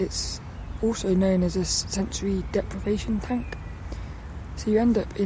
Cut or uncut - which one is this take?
uncut